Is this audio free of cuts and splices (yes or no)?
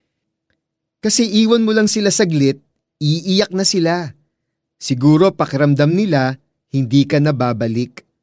yes